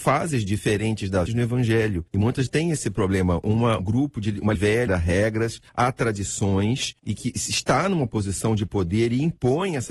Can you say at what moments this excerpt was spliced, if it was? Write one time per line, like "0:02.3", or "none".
0:01.3
0:02.1
0:02.5
0:03.8
0:04.5
0:04.9
0:05.7
0:07.0